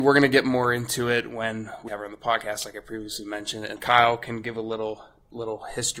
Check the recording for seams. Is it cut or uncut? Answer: cut